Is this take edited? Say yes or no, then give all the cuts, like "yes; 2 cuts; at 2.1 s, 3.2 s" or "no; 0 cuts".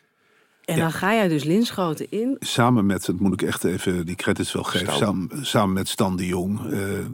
no; 0 cuts